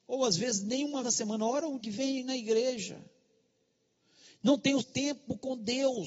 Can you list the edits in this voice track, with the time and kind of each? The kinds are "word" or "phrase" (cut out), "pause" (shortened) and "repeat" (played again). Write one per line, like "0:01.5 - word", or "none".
0:01.0 - word
0:01.8 - word
0:04.8 - word